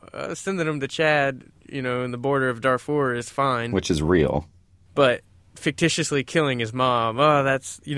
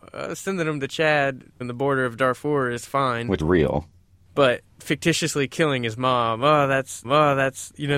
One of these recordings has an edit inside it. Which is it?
second; 4 cuts; at 1.6 s, 3.4 s, 4.7 s, 7.0 s

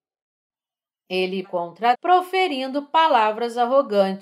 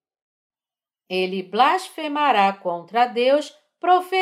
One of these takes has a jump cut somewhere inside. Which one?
first; 2 cuts; at 1.4 s, 1.9 s

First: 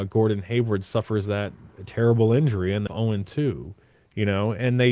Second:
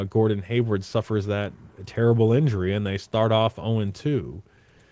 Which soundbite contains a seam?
first; 2 cuts; at 2.9 s, 3.8 s

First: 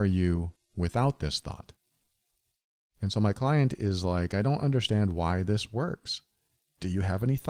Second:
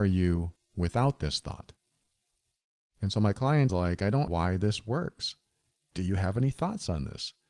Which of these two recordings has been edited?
second; 2 cuts; at 3.7 s, 4.3 s

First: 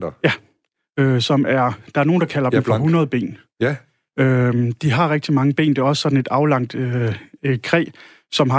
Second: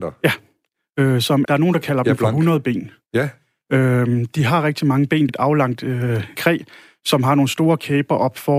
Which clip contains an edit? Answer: second; 3 cuts; at 1.4 s, 5.3 s, 6.3 s

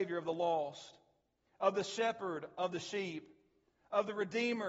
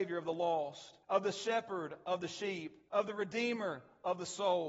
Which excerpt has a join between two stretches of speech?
second; 2 cuts; at 1.0 s, 2.9 s

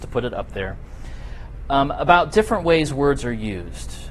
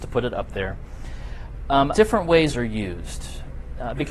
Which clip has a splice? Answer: second; 2 cuts; at 1.9 s, 2.5 s

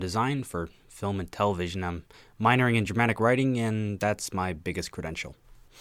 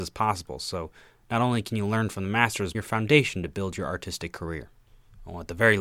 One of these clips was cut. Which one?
second; 1 cut; at 2.7 s

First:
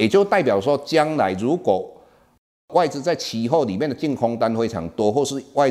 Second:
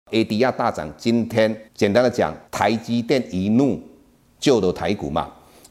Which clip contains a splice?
second; 2 cuts; at 1.7 s, 2.5 s

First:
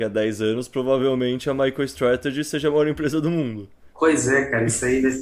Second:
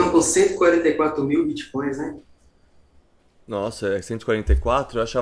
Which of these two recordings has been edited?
first; 1 cut; at 3.9 s

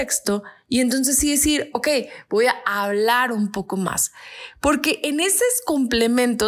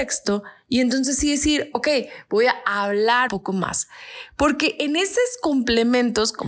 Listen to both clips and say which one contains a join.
second; 1 cut; at 3.3 s

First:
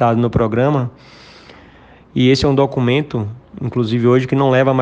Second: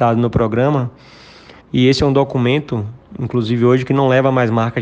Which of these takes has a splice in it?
second; 1 cut; at 1.6 s

